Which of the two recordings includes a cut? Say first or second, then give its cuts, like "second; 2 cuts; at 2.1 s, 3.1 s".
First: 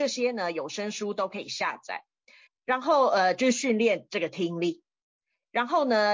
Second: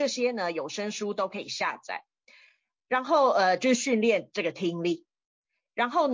first; 1 cut; at 2.5 s